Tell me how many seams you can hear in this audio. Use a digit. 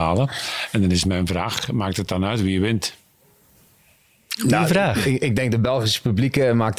0